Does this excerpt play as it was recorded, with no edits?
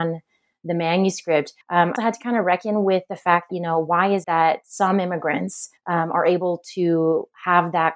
no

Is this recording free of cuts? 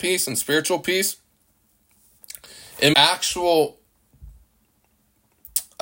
no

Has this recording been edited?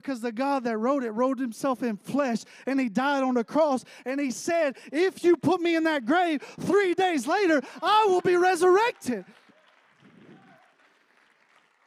no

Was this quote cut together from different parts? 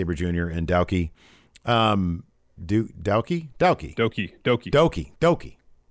yes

